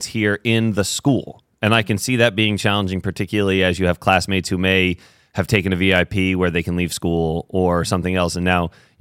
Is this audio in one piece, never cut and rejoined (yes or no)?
yes